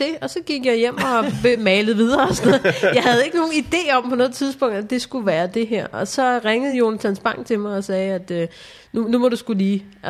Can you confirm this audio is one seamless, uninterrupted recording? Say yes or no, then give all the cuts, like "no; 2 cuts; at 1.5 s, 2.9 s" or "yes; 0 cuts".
yes; 0 cuts